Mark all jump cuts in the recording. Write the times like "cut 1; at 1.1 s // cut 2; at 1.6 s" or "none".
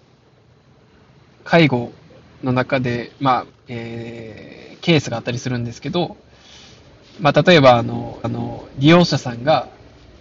cut 1; at 3.5 s // cut 2; at 8.2 s